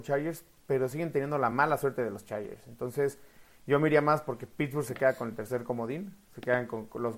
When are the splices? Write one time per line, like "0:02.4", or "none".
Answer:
none